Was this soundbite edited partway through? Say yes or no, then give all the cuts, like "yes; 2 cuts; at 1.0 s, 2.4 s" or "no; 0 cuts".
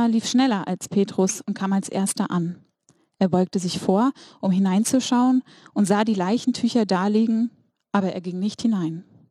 no; 0 cuts